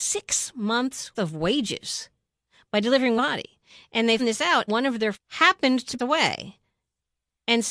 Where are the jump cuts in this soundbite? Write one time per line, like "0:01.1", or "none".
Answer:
0:01.1
0:03.2
0:04.2
0:04.7
0:05.1
0:06.0